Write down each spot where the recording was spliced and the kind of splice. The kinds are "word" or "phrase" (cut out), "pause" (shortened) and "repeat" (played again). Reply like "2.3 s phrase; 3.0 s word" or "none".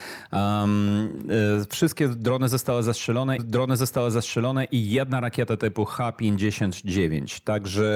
3.4 s repeat